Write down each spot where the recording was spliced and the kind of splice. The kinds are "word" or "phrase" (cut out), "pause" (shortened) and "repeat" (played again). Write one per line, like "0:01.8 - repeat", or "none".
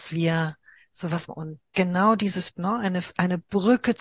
0:01.3 - phrase
0:02.5 - word